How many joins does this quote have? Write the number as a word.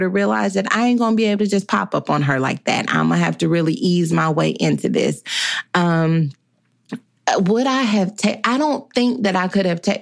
zero